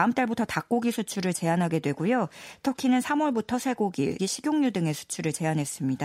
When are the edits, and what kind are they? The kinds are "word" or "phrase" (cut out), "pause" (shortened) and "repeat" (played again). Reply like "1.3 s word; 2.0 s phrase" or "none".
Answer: 4.2 s word